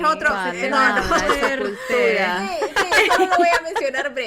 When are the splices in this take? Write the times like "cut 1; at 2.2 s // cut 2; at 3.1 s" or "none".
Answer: none

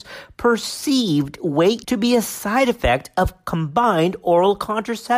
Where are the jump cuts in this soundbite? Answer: cut 1; at 1.8 s

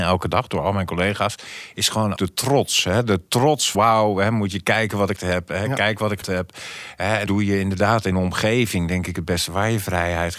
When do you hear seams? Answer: cut 1; at 2.2 s // cut 2; at 3.7 s // cut 3; at 5.2 s // cut 4; at 6.2 s // cut 5; at 7.3 s // cut 6; at 8.1 s

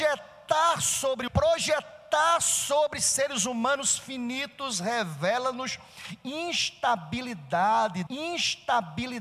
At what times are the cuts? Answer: cut 1; at 1.3 s // cut 2; at 8.1 s

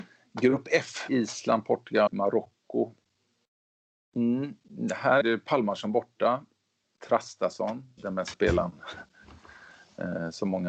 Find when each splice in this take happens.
cut 1; at 1.1 s // cut 2; at 2.1 s // cut 3; at 5.2 s // cut 4; at 8.0 s // cut 5; at 8.3 s

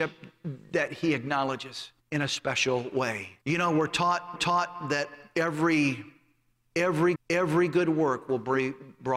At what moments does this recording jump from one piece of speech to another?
cut 1; at 2.0 s // cut 2; at 3.4 s // cut 3; at 4.4 s // cut 4; at 7.2 s

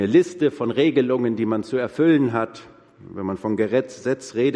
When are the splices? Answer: none

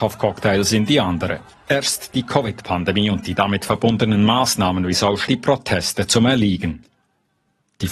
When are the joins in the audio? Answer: cut 1; at 1.5 s // cut 2; at 5.3 s

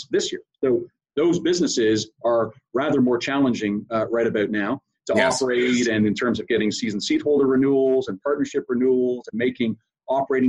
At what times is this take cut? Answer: none

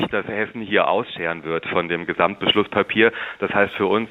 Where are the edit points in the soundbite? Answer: none

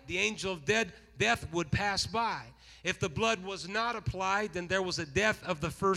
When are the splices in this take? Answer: none

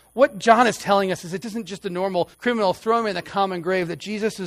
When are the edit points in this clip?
cut 1; at 1.4 s // cut 2; at 2.3 s

